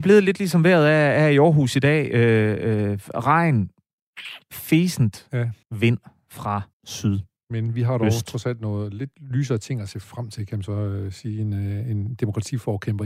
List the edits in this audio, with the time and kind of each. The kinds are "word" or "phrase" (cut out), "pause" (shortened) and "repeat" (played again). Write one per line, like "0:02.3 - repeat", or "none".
0:05.6 - pause
0:06.7 - pause